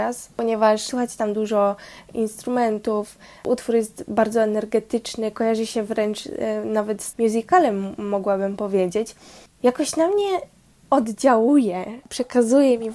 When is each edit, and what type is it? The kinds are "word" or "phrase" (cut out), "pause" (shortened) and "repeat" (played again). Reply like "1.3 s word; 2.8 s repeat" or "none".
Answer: 7.1 s word